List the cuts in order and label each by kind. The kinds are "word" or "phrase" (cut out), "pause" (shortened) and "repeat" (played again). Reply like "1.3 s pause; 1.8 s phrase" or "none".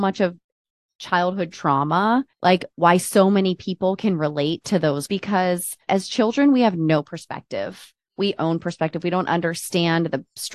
2.3 s pause; 5.1 s phrase; 5.9 s word; 8.4 s phrase